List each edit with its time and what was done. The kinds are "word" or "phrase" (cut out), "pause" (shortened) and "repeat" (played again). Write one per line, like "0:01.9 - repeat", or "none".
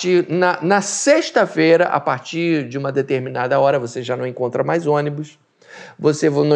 none

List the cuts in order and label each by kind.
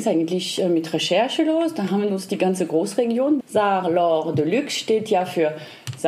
0:02.1 - phrase
0:03.4 - word

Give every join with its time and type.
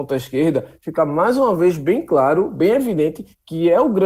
none

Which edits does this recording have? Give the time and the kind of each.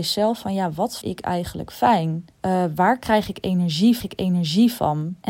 0:01.0 - word
0:02.3 - pause
0:04.0 - repeat

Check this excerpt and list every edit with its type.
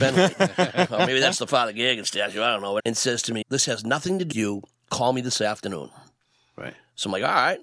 0:02.8 - word
0:03.4 - word
0:04.3 - word

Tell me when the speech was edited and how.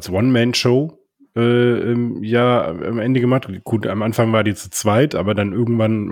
none

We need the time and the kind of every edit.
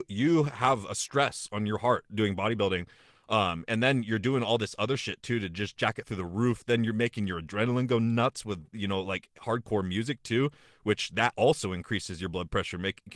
none

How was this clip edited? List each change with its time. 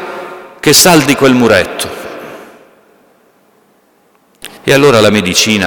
0:01.1 - word
0:04.6 - pause

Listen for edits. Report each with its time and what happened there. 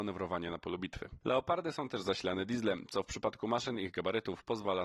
none

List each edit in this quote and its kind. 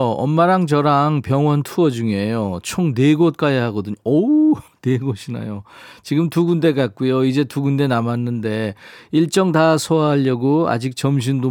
none

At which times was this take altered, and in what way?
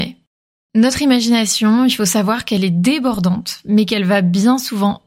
none

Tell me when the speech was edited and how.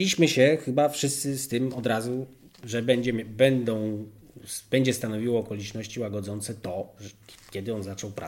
none

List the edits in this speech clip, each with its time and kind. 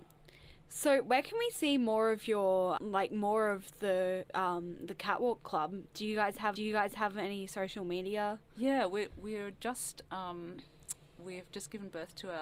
0:02.8 - word
0:06.6 - repeat

